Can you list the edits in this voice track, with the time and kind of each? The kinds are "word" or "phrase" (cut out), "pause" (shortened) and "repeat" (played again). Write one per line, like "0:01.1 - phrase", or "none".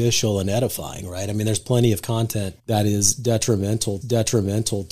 0:02.6 - pause
0:04.0 - repeat

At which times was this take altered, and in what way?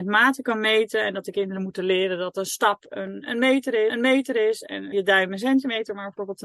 0:03.9 - repeat
0:04.9 - word

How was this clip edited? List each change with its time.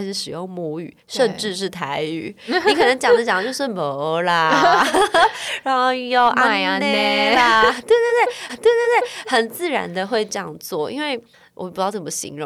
0:08.5 - repeat
0:11.3 - pause

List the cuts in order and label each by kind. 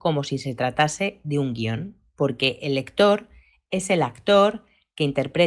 none

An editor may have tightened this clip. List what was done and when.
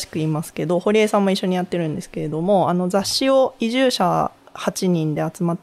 none

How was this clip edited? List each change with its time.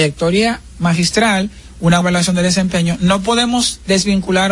0:02.0 - word

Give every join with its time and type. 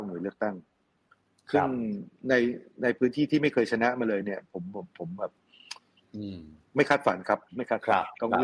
0:07.5 - pause

